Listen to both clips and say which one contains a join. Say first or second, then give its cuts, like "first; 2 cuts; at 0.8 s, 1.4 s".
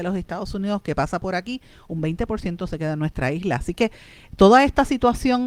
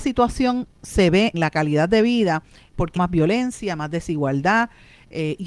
second; 2 cuts; at 1.3 s, 3.0 s